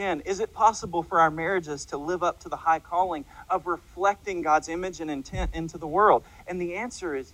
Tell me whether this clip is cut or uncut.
uncut